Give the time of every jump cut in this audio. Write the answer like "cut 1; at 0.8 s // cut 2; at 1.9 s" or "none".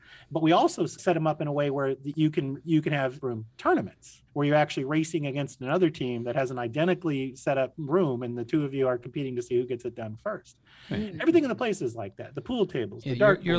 cut 1; at 1.0 s // cut 2; at 3.2 s // cut 3; at 4.3 s